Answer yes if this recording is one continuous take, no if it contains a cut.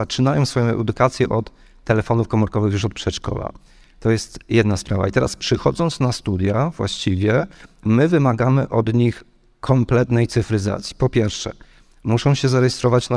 yes